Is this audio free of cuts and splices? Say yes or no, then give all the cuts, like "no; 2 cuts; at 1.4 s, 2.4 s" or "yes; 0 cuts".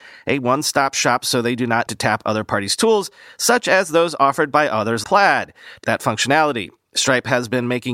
no; 3 cuts; at 1.9 s, 5.0 s, 5.8 s